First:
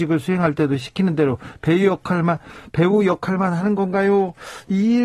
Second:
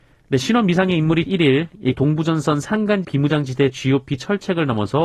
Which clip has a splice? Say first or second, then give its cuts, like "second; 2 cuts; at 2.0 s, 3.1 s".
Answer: second; 3 cuts; at 1.3 s, 1.9 s, 3.0 s